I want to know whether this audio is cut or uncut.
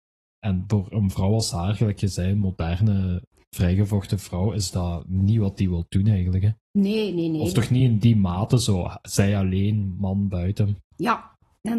uncut